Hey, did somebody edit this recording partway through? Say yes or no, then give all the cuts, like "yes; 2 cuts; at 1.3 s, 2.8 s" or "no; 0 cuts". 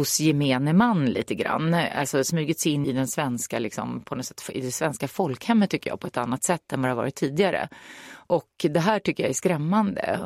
yes; 1 cut; at 2.8 s